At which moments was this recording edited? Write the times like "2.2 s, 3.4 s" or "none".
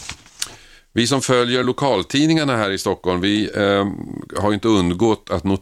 none